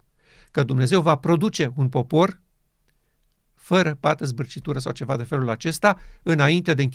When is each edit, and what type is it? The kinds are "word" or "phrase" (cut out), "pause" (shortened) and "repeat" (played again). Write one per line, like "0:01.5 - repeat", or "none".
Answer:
none